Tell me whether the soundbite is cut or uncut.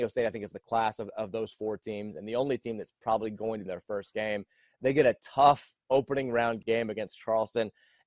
cut